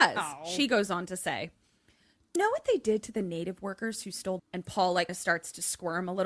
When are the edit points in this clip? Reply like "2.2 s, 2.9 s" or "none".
2.4 s, 4.4 s, 5.1 s